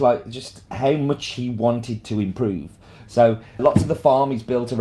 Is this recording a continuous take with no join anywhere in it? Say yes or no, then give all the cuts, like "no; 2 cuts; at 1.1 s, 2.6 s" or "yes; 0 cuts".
no; 1 cut; at 3.6 s